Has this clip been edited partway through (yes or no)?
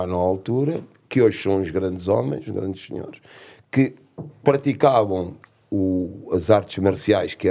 no